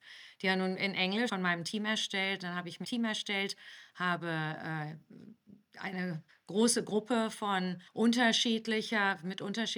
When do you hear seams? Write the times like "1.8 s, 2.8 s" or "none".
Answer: 1.3 s, 2.8 s, 6.3 s, 7.9 s

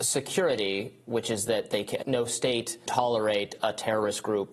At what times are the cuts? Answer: 2.0 s, 2.9 s

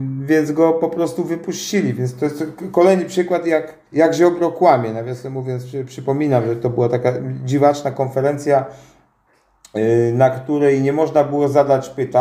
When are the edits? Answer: 3.9 s

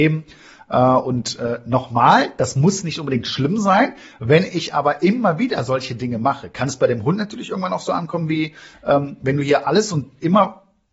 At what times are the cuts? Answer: none

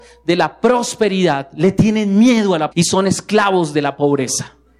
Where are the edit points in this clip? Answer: 2.7 s

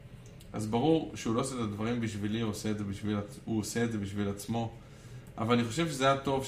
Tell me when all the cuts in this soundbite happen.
none

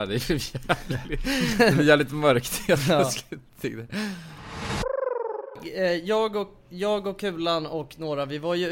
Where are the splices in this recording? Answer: none

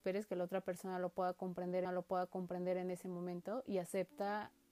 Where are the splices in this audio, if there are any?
1.8 s

